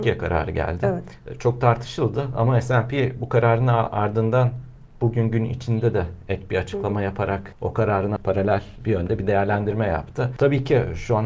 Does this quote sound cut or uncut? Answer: uncut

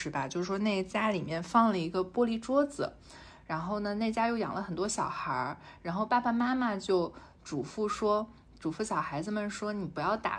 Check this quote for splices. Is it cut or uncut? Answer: uncut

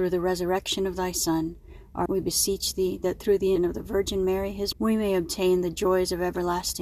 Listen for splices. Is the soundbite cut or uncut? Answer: cut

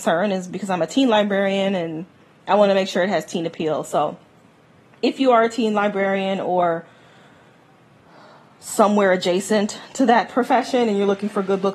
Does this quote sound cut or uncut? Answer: uncut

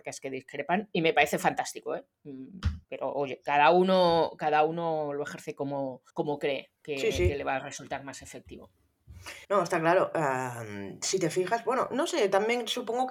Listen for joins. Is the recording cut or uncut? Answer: cut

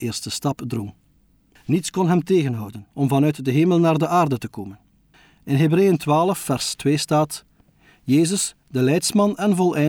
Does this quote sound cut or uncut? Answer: uncut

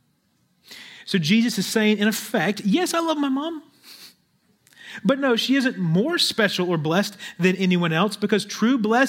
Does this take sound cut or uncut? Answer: uncut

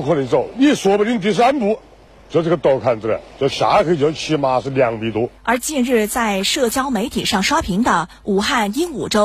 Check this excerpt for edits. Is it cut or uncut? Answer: cut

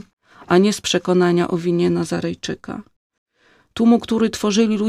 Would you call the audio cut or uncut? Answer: uncut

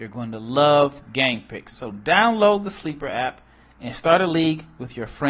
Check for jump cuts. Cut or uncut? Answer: uncut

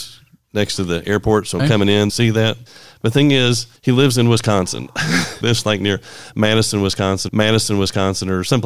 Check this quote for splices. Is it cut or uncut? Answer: cut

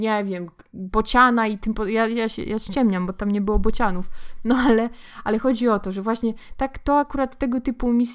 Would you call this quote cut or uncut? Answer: uncut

